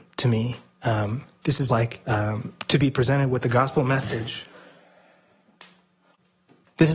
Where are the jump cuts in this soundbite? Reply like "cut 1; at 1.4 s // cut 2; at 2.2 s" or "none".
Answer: cut 1; at 1.7 s